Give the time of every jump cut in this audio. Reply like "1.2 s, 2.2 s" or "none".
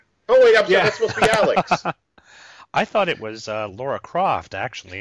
none